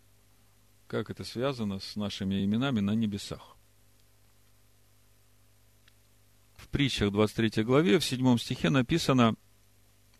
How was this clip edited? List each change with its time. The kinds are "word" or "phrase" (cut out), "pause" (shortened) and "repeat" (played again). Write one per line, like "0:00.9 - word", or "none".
none